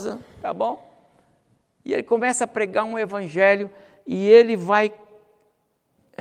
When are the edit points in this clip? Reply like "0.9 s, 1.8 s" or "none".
none